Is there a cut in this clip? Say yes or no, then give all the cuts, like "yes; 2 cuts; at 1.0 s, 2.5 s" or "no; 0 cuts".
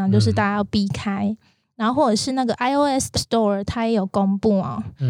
yes; 1 cut; at 3.1 s